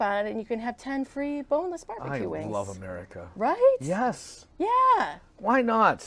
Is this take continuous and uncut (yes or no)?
yes